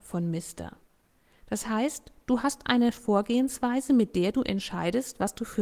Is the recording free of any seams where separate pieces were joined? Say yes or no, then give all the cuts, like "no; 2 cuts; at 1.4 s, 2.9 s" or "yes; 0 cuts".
yes; 0 cuts